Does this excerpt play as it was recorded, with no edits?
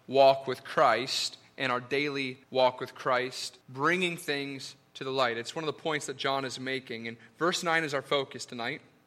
no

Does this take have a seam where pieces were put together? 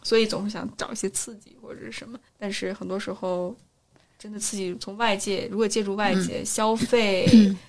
yes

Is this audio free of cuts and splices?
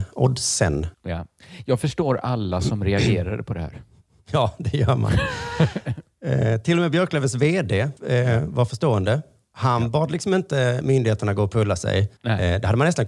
no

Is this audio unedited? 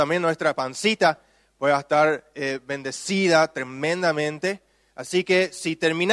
yes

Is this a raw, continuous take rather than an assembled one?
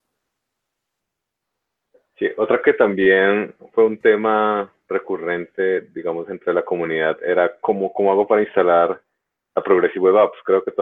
no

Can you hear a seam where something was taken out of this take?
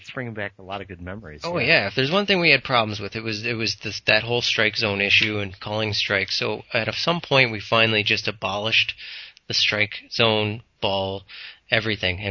no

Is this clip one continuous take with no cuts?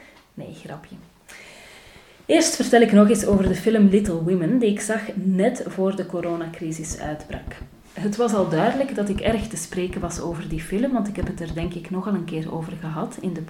yes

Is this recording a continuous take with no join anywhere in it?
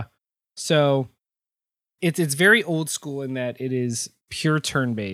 yes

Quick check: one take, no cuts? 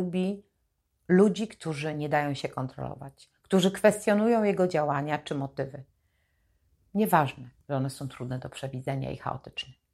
yes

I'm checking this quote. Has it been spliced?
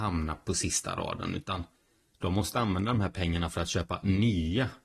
no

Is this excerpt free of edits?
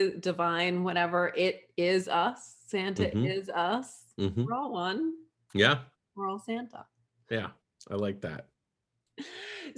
yes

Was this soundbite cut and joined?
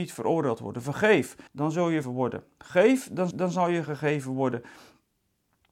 yes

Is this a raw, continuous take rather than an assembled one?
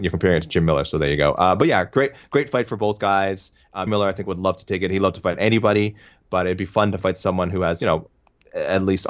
no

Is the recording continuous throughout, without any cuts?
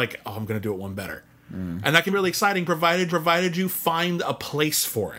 no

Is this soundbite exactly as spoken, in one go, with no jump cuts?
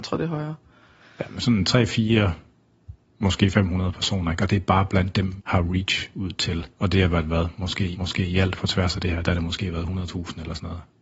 no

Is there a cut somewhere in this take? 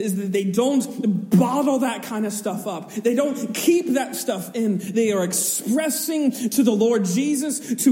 no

